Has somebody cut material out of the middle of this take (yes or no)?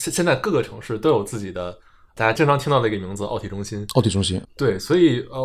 yes